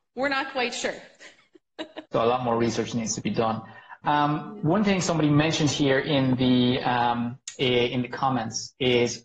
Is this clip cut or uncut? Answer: cut